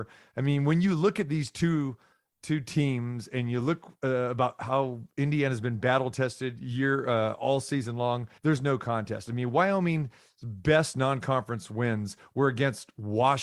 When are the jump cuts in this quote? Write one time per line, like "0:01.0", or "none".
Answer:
0:08.4